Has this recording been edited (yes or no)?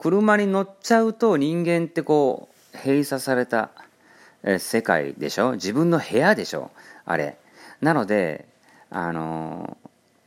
yes